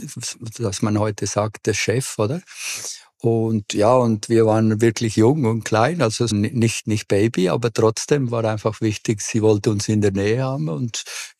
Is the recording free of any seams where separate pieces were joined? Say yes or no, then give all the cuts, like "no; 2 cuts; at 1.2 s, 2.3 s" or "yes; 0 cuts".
no; 1 cut; at 6.3 s